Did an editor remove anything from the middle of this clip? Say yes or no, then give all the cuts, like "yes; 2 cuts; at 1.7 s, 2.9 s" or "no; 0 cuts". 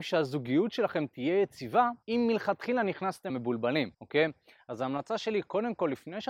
yes; 3 cuts; at 2.0 s, 3.3 s, 3.9 s